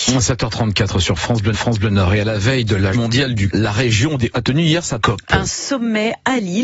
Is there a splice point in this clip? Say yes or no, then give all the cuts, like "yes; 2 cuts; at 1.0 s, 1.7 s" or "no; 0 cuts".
yes; 5 cuts; at 1.5 s, 2.9 s, 3.5 s, 4.3 s, 5.0 s